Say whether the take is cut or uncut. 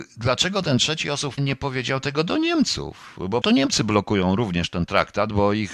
cut